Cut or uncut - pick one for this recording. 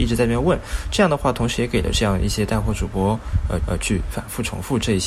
cut